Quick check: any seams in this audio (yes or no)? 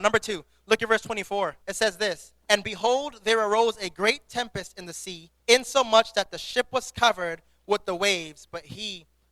yes